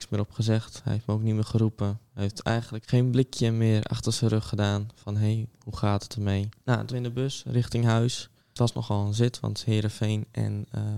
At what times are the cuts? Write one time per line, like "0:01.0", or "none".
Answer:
0:02.8
0:06.6
0:06.9
0:08.4